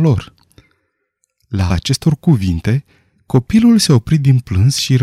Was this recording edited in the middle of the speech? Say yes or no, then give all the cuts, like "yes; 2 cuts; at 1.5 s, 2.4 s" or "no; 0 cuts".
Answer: yes; 1 cut; at 1.7 s